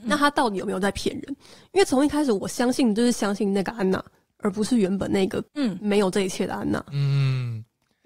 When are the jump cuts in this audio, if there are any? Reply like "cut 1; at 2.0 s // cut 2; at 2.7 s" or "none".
cut 1; at 5.5 s